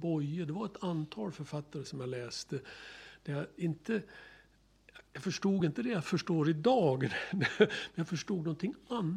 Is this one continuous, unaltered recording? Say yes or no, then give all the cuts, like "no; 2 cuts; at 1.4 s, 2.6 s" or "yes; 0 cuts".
yes; 0 cuts